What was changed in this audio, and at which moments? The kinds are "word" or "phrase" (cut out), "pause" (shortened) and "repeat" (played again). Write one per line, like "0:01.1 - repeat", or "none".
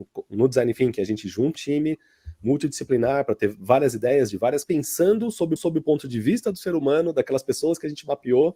0:01.5 - word
0:04.6 - word
0:05.6 - repeat

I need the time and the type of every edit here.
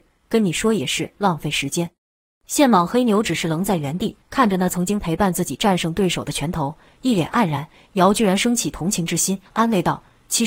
0:02.0 - pause
0:04.2 - pause
0:09.5 - pause

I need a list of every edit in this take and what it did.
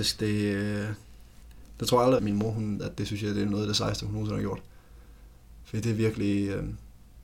0:02.2 - word
0:02.8 - word

